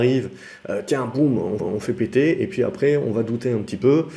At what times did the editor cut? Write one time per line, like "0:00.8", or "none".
0:01.6